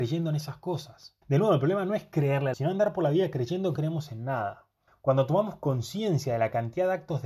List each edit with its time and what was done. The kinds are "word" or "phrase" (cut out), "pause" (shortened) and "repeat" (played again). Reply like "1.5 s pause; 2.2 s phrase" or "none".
1.2 s pause; 2.5 s phrase; 3.8 s word; 4.9 s pause